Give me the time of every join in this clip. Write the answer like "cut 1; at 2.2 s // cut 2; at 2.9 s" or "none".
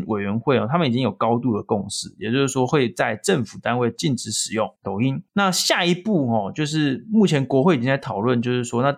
cut 1; at 4.8 s // cut 2; at 5.3 s